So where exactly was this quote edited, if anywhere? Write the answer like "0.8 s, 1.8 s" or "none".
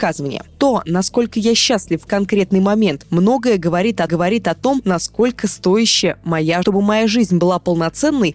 2.1 s, 4.1 s, 6.6 s